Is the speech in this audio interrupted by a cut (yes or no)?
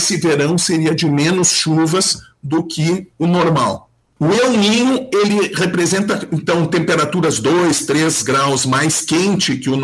no